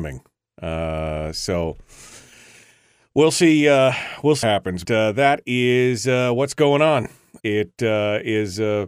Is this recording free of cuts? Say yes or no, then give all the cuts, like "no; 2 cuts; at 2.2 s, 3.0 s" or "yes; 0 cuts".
no; 3 cuts; at 4.4 s, 4.8 s, 7.4 s